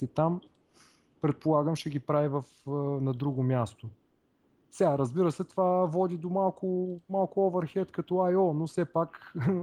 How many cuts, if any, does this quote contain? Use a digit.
0